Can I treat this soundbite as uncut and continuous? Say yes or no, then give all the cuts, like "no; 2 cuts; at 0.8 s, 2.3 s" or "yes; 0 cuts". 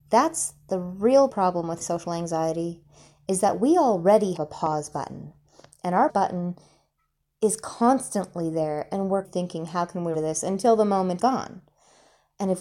no; 7 cuts; at 1.3 s, 1.8 s, 4.4 s, 6.1 s, 9.2 s, 10.1 s, 11.2 s